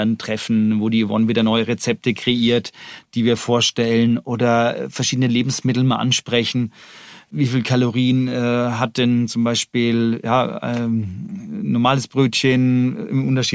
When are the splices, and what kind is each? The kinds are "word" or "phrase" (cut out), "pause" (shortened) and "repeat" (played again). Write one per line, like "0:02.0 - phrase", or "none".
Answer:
none